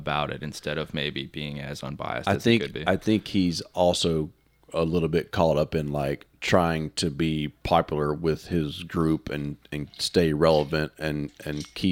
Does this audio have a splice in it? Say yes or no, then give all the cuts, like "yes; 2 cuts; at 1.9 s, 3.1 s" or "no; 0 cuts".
no; 0 cuts